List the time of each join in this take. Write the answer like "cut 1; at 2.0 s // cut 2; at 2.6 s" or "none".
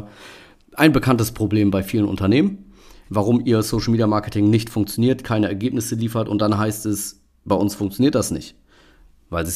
none